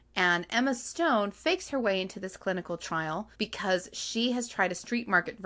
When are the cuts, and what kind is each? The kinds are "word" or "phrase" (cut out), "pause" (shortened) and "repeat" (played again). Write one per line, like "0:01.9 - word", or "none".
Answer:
0:03.3 - pause